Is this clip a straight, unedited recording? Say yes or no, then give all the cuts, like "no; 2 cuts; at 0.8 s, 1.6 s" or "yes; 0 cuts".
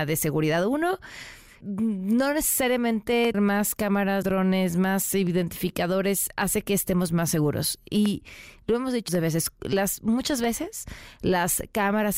no; 4 cuts; at 1.6 s, 3.3 s, 4.2 s, 9.1 s